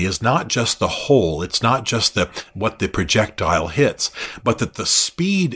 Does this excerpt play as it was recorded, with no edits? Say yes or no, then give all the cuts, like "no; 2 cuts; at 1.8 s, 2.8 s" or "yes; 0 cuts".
yes; 0 cuts